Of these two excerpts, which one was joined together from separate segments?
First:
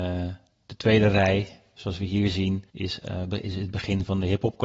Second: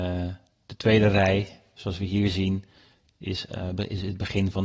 first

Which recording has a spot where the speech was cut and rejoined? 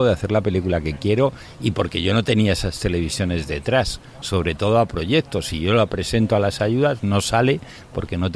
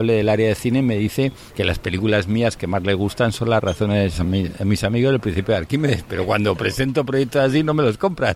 second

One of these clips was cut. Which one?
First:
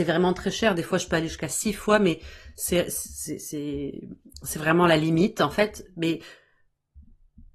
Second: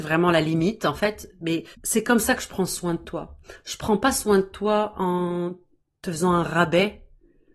second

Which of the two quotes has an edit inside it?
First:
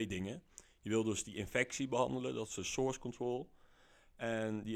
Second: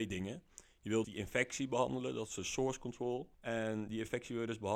second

